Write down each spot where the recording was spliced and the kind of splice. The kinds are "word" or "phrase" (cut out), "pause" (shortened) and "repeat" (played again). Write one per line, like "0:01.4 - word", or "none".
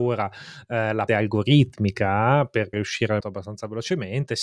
0:01.1 - word
0:02.7 - phrase
0:03.2 - word